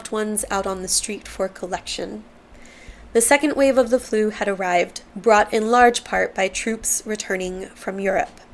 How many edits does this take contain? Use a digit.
1